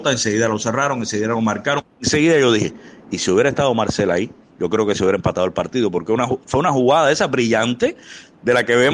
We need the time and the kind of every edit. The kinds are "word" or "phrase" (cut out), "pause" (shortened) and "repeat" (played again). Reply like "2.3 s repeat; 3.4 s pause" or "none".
none